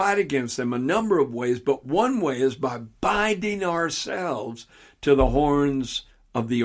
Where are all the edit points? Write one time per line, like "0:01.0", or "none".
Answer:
none